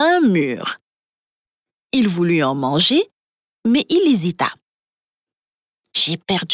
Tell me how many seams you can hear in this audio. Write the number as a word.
zero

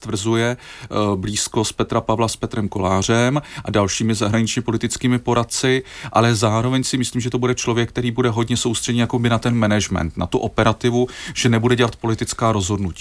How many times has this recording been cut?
zero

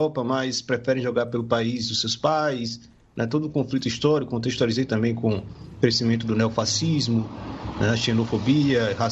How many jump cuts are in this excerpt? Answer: zero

